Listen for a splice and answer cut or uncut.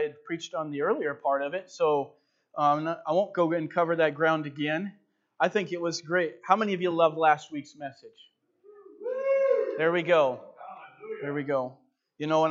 uncut